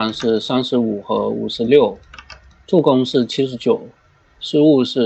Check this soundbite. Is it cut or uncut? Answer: uncut